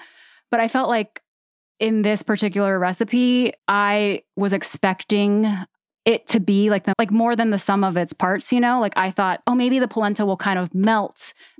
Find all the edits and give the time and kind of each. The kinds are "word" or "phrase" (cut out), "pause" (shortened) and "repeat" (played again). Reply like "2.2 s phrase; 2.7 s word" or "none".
3.6 s pause; 6.9 s word; 9.4 s word

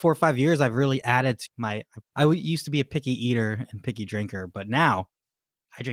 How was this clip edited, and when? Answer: 1.5 s word; 2.1 s pause

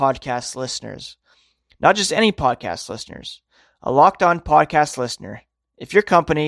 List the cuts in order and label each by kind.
none

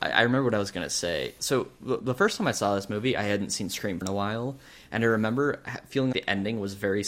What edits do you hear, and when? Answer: 4.0 s word; 6.1 s word

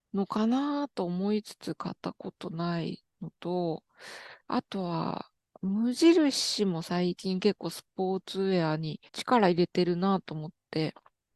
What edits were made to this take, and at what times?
2.0 s pause; 3.1 s pause; 4.4 s pause; 9.1 s pause

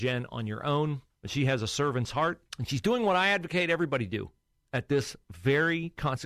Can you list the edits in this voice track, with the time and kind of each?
1.1 s pause; 2.5 s pause; 4.4 s pause

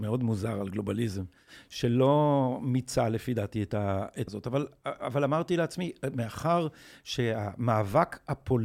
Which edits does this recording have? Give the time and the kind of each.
4.3 s word

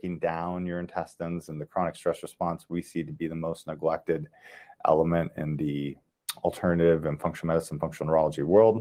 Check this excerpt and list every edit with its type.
none

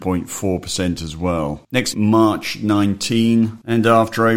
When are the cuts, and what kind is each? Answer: 1.9 s phrase

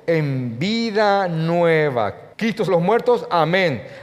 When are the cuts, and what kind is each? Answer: 2.3 s pause; 2.7 s phrase

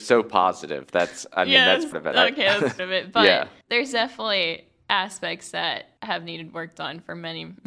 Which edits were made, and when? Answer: 1.9 s word; 2.8 s word; 3.6 s pause; 6.0 s pause

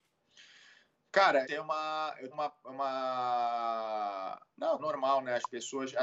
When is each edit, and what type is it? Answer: 1.4 s word; 2.3 s word; 4.8 s word

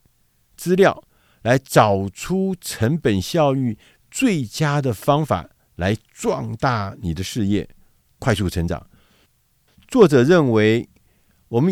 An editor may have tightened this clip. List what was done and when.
none

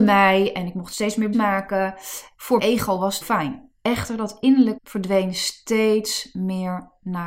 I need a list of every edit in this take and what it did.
1.3 s word; 2.6 s word; 3.2 s phrase; 4.8 s phrase

